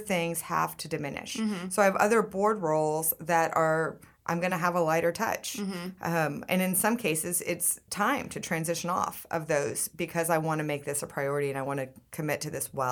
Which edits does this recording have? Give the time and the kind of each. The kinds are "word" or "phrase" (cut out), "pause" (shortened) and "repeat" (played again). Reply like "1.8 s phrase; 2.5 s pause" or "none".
none